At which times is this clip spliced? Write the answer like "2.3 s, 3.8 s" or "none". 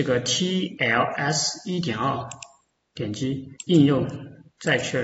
3.6 s